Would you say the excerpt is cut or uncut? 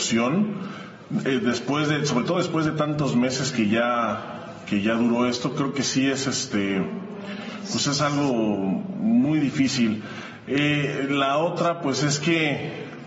uncut